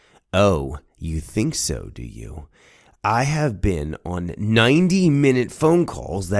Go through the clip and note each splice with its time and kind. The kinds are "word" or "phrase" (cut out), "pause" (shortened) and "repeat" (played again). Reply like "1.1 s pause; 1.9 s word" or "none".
none

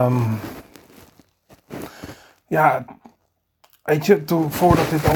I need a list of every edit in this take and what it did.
none

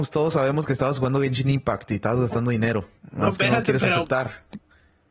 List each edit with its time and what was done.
none

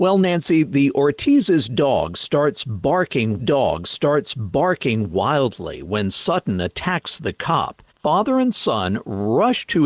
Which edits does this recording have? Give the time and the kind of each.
3.4 s repeat; 7.9 s pause

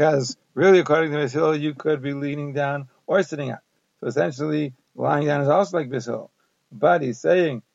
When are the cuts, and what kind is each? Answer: none

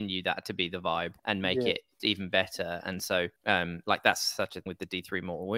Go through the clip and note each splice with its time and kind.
1.2 s pause; 2.0 s word; 3.4 s pause; 4.7 s word

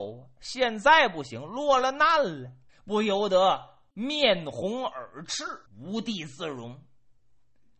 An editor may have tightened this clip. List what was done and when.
2.7 s pause; 5.7 s pause

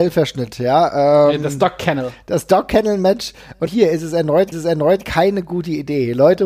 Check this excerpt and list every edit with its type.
3.7 s word; 4.5 s repeat

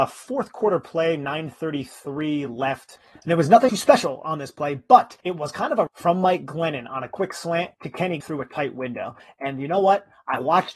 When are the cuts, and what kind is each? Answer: 3.7 s phrase; 5.2 s pause; 5.9 s word; 7.7 s pause; 8.2 s word

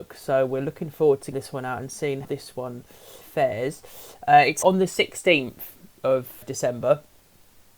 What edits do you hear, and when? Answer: 1.3 s word; 2.2 s word; 3.2 s word; 4.6 s word; 6.4 s word

